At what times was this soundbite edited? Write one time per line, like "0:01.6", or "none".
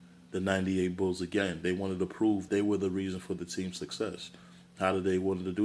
0:02.5